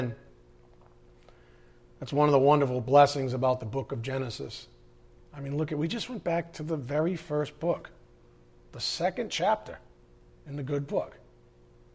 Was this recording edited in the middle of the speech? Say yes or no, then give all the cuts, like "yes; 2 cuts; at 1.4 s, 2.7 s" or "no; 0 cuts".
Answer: no; 0 cuts